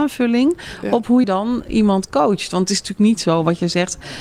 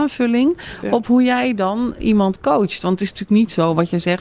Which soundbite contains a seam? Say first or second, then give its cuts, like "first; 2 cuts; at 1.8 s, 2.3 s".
first; 1 cut; at 1.2 s